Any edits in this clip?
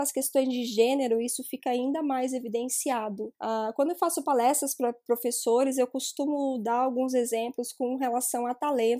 yes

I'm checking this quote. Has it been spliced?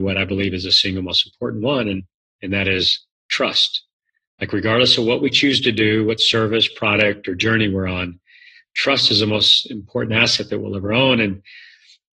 no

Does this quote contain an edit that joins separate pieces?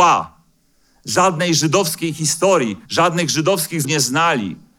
yes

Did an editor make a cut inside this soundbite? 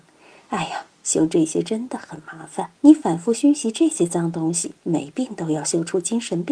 yes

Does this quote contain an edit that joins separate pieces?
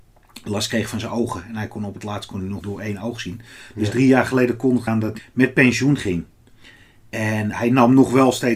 yes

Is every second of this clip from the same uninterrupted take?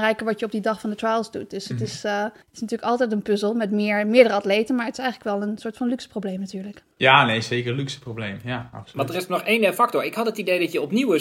no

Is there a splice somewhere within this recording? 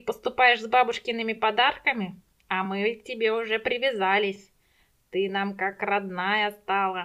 no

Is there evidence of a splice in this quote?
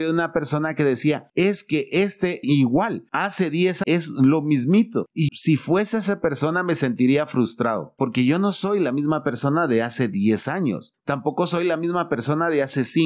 yes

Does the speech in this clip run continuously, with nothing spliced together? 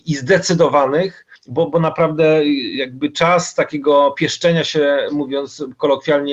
no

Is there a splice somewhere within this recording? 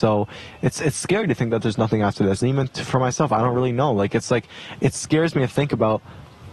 no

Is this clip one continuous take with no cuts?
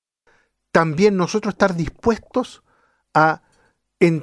yes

